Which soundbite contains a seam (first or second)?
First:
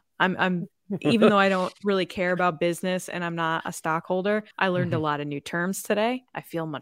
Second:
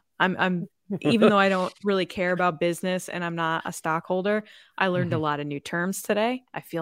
first